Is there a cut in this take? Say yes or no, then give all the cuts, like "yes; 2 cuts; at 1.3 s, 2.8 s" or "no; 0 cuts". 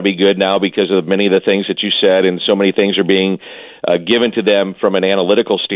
no; 0 cuts